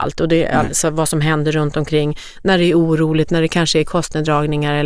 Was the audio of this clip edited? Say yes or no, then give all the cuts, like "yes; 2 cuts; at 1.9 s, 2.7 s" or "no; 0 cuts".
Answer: no; 0 cuts